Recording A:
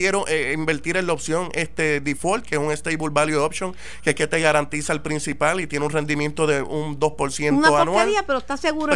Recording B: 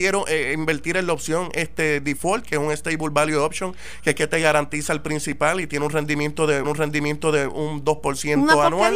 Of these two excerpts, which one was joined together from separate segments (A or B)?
B